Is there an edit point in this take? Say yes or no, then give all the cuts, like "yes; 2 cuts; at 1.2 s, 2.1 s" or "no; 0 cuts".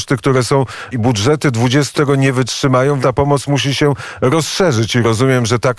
yes; 3 cuts; at 0.9 s, 1.9 s, 3.0 s